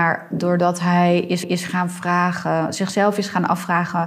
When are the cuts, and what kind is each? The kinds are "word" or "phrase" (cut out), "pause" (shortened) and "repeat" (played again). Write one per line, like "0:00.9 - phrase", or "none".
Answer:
0:01.4 - repeat